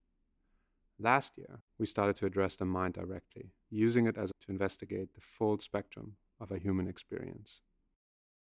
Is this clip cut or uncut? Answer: cut